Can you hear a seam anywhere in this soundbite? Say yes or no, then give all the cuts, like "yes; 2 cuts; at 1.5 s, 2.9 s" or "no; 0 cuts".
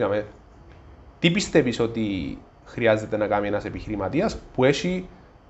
no; 0 cuts